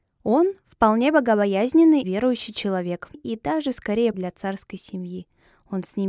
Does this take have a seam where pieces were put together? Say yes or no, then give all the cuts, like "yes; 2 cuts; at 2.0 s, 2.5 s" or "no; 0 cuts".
yes; 3 cuts; at 2.0 s, 3.1 s, 4.1 s